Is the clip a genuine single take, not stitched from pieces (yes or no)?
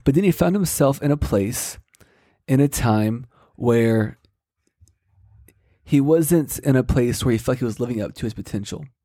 yes